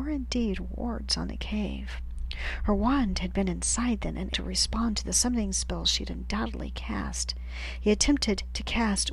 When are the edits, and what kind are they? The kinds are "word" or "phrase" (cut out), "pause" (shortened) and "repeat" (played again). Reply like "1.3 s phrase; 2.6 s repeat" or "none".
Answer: 4.3 s word